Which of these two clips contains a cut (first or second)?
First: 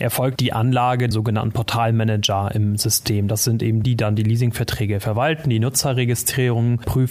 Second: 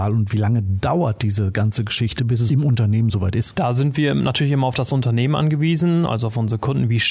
first